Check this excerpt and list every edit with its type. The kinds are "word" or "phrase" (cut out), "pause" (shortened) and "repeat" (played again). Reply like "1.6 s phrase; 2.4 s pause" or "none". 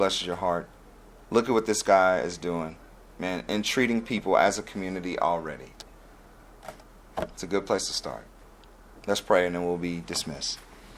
none